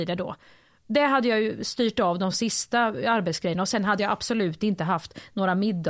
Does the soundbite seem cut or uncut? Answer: uncut